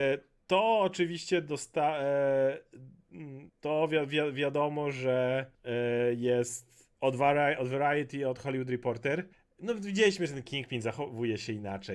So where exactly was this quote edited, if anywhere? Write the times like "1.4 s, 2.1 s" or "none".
3.5 s, 5.5 s, 6.9 s, 9.3 s

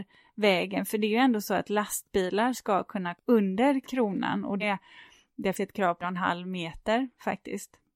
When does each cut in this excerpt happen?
3.1 s, 4.6 s, 5.5 s, 6.0 s

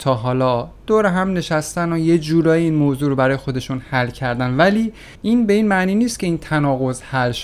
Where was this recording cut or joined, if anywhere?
5.1 s

